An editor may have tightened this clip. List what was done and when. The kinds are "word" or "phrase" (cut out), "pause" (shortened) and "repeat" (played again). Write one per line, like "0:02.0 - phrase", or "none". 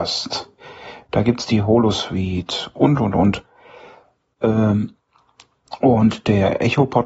none